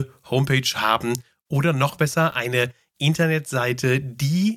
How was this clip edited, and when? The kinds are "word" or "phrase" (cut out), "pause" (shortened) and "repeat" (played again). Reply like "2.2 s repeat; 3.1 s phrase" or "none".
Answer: none

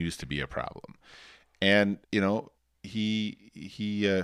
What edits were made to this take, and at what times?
2.0 s pause; 2.6 s pause

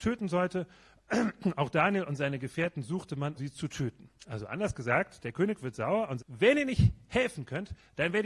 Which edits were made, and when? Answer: 3.4 s word; 4.2 s pause; 6.2 s word

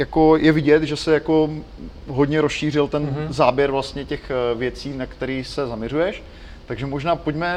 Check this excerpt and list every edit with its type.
none

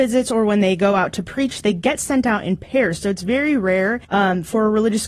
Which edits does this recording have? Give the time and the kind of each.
4.0 s pause

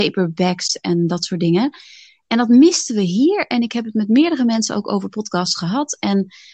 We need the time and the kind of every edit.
none

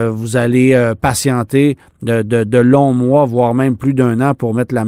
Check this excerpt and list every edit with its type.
none

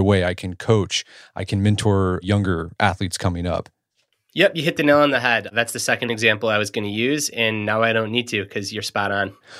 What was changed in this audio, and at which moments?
none

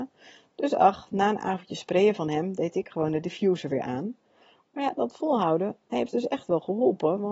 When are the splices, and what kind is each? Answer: none

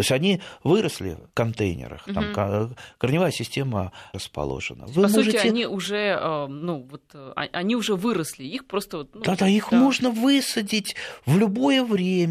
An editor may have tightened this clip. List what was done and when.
1.3 s word; 4.1 s word

